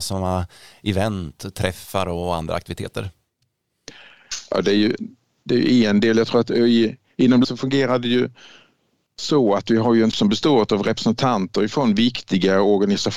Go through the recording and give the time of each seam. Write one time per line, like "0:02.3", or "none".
0:07.4
0:10.1